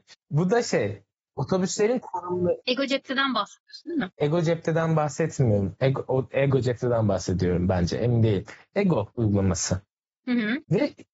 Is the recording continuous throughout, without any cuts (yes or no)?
no